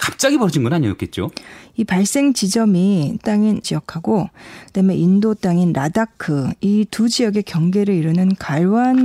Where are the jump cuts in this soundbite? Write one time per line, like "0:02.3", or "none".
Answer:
0:03.2
0:03.6